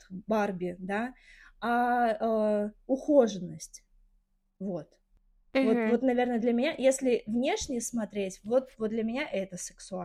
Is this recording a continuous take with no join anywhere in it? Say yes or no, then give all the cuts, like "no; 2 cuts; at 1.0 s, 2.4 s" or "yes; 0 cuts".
yes; 0 cuts